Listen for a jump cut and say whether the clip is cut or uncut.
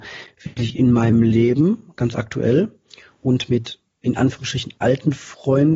uncut